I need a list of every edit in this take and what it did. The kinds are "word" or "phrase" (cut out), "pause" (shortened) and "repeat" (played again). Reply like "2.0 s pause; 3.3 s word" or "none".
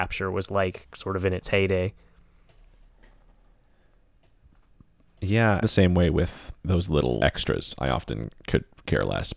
5.6 s phrase; 6.6 s pause; 7.2 s word